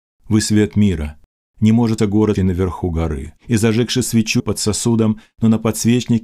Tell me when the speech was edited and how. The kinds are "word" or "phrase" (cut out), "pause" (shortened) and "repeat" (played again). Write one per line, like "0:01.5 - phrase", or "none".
0:02.0 - word
0:02.4 - word
0:03.4 - pause
0:04.4 - phrase